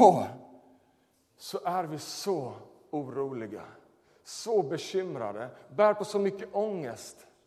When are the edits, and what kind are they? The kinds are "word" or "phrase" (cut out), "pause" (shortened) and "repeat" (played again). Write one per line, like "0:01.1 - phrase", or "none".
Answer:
none